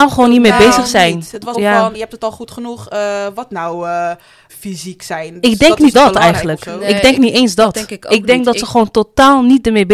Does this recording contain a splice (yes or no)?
yes